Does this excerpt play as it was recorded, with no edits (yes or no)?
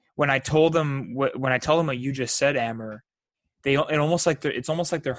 yes